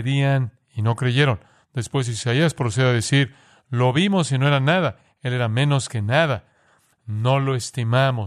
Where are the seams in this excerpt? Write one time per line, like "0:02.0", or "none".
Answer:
none